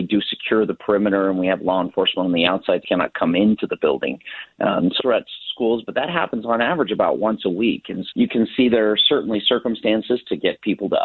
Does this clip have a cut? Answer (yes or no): yes